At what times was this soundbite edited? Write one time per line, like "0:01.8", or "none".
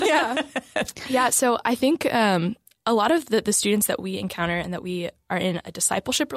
none